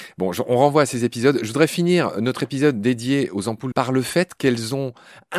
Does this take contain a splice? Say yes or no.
yes